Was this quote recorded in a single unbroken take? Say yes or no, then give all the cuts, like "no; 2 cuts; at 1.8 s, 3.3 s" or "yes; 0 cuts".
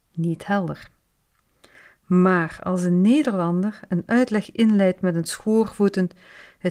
yes; 0 cuts